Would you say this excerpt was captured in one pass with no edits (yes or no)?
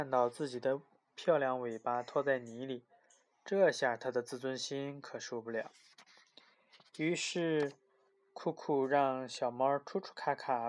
yes